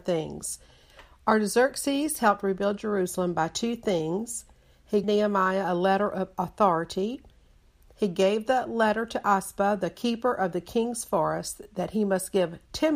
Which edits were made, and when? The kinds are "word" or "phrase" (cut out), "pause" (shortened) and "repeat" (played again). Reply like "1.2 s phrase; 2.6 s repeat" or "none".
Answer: 5.0 s word